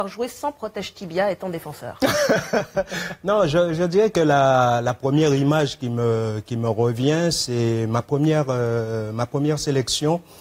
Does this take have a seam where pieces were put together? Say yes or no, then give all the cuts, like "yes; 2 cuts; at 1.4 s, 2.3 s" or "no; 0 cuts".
no; 0 cuts